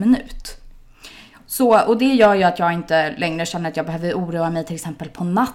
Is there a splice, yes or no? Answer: no